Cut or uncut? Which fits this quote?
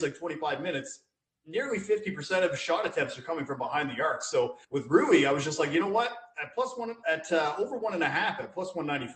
cut